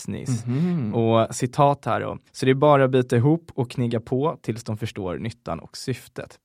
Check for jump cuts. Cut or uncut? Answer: cut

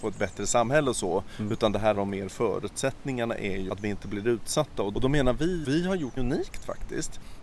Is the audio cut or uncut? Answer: cut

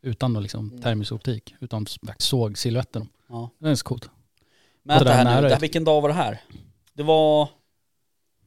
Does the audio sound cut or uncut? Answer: cut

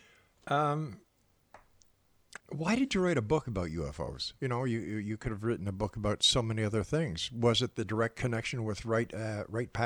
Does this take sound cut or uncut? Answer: cut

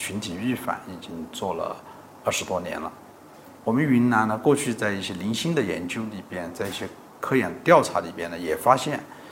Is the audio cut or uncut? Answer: cut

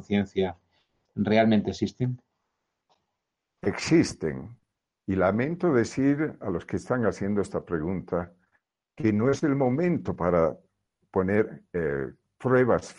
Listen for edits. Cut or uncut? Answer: uncut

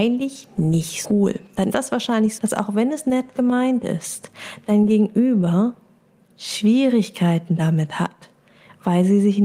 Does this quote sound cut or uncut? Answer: cut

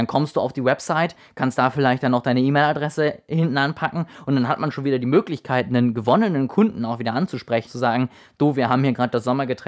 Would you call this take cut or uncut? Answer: cut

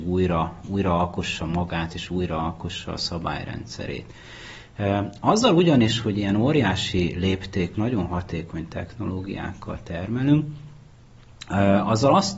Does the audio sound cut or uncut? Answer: cut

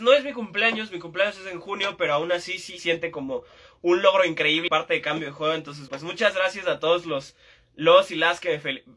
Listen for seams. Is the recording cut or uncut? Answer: cut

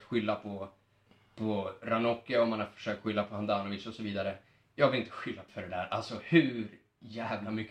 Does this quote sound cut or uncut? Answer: cut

